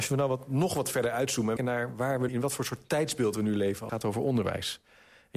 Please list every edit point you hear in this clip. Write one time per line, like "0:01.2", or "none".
0:01.6
0:02.3
0:03.9